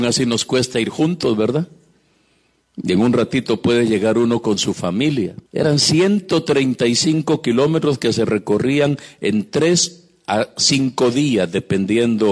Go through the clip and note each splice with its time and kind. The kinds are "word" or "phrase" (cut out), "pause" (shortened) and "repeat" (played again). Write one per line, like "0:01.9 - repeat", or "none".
0:05.5 - pause